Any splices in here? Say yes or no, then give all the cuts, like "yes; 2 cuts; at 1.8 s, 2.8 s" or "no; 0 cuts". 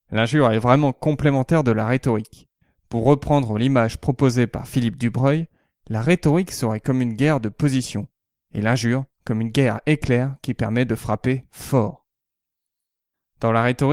no; 0 cuts